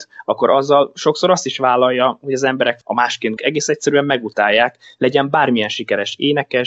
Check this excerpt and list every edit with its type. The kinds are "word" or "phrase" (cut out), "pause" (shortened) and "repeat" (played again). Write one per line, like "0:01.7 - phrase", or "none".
0:02.8 - word
0:03.4 - word